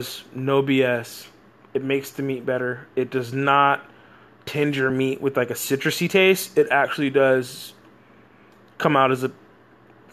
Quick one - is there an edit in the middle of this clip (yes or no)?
no